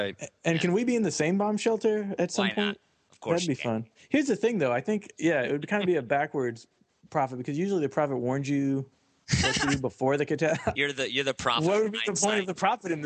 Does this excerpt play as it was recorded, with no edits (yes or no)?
yes